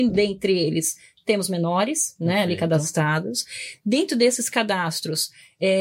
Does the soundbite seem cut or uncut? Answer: uncut